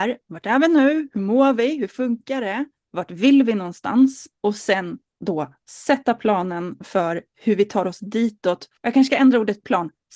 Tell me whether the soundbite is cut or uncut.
cut